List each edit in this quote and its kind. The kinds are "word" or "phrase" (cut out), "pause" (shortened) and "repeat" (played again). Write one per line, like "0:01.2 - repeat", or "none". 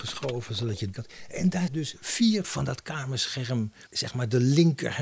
0:00.9 - word
0:01.7 - word
0:02.4 - word
0:03.9 - word